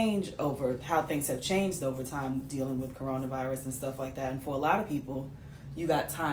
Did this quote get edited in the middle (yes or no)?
no